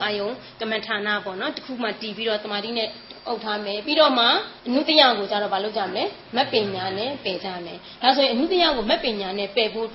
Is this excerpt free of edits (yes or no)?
no